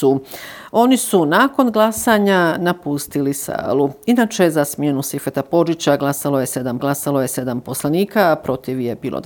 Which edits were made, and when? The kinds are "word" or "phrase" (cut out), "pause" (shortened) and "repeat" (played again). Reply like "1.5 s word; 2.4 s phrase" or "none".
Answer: 6.8 s repeat